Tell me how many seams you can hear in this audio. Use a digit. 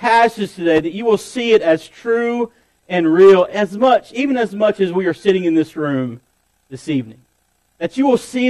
0